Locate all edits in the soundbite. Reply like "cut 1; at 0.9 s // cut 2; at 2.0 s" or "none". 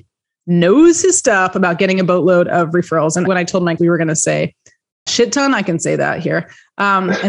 cut 1; at 3.3 s // cut 2; at 3.8 s // cut 3; at 5.1 s